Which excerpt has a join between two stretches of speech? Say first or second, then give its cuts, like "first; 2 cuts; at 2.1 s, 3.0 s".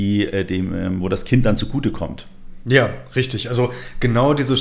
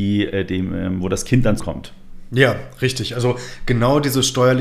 second; 1 cut; at 1.6 s